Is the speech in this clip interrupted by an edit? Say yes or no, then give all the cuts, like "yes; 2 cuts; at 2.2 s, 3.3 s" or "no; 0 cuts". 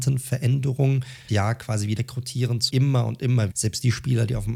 yes; 4 cuts; at 1.3 s, 2.0 s, 2.7 s, 3.5 s